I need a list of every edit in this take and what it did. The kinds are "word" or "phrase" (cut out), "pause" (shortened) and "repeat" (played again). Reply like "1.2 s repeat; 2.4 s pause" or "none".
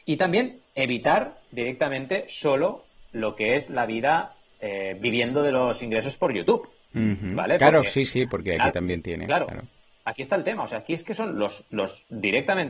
none